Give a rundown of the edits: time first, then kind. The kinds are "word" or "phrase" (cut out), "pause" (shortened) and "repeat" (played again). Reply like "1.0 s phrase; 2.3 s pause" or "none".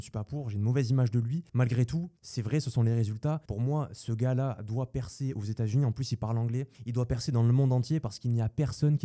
1.5 s pause; 2.2 s pause; 3.4 s pause; 6.7 s pause